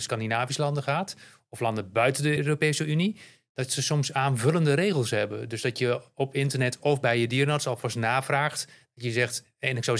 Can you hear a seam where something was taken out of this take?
no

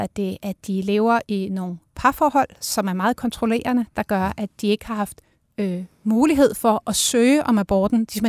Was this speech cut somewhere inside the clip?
yes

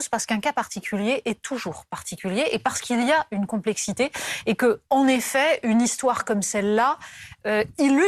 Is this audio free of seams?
yes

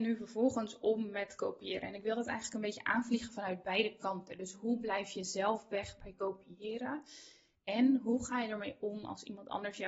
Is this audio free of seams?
yes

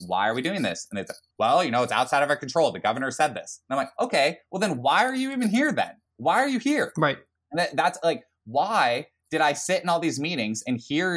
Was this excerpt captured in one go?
no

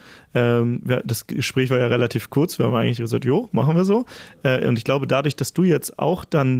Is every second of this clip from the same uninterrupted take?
yes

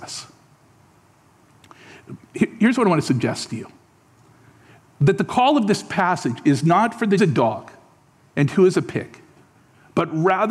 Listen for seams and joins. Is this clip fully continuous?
no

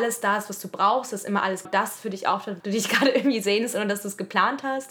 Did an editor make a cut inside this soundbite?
yes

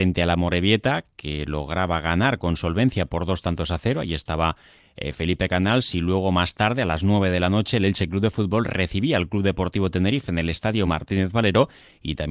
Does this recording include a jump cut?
no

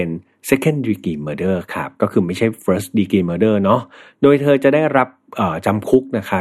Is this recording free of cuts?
yes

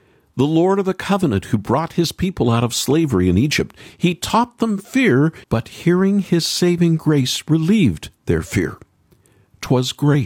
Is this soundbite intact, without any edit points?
no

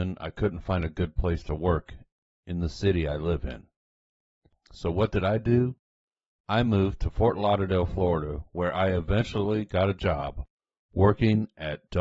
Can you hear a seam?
no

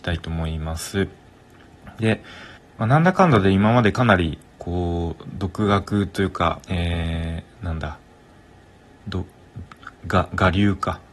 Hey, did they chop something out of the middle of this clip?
yes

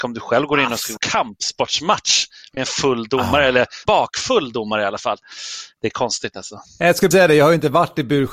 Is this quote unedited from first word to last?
no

